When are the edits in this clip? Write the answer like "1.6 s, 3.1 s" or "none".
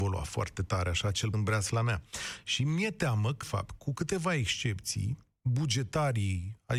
1.3 s, 3.4 s